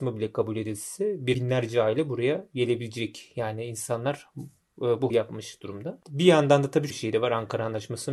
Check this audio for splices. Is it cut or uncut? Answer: cut